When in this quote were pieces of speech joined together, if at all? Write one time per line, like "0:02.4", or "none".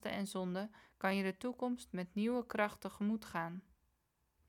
none